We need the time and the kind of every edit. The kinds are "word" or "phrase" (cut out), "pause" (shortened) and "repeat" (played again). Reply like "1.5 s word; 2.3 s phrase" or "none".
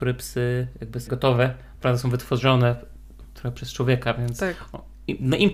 1.1 s word; 1.8 s phrase